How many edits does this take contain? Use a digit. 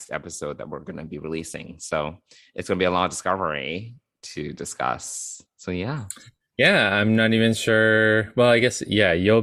0